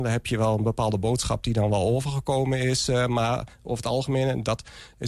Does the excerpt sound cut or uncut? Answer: uncut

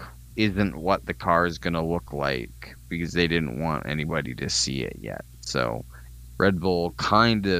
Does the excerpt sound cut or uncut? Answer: uncut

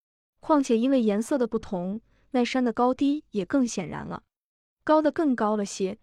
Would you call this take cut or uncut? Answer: uncut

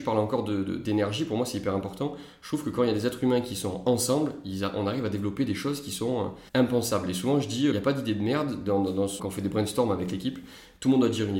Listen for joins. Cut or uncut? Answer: cut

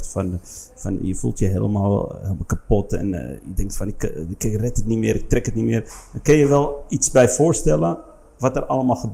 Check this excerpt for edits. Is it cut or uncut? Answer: uncut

